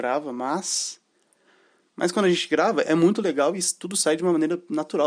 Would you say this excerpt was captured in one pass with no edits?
yes; 0 cuts

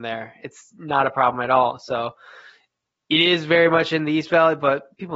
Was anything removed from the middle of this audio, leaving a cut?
no; 0 cuts

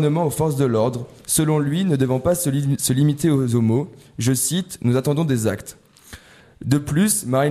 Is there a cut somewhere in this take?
no; 0 cuts

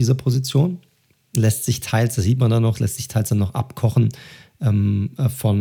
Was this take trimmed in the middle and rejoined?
no; 0 cuts

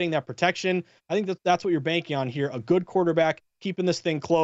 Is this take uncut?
yes; 0 cuts

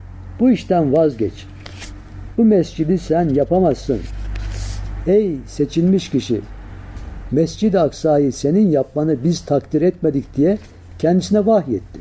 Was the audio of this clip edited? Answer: no; 0 cuts

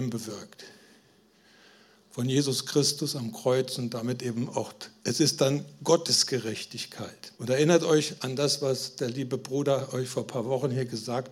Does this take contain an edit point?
yes; 1 cut; at 7.3 s

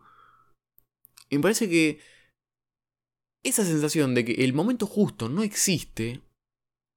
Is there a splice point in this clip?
no; 0 cuts

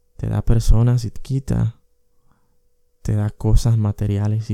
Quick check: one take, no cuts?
no; 1 cut; at 1.2 s

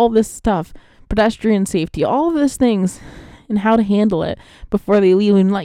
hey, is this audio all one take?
yes; 0 cuts

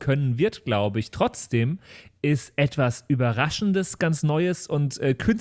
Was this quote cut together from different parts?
yes; 1 cut; at 4.0 s

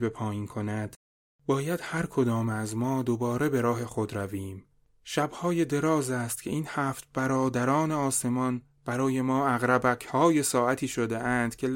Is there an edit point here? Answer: no; 0 cuts

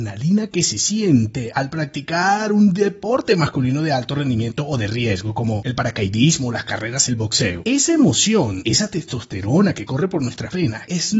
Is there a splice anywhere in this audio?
yes; 1 cut; at 7.1 s

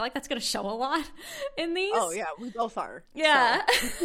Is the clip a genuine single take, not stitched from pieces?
yes; 0 cuts

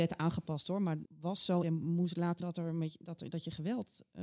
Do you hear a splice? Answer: yes; 3 cuts; at 1.0 s, 1.6 s, 2.4 s

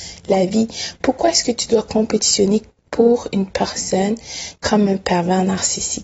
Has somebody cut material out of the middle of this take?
no; 0 cuts

